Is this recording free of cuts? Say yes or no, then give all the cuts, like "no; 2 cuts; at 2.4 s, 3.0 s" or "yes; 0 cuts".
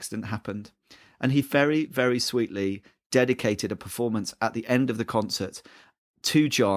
yes; 0 cuts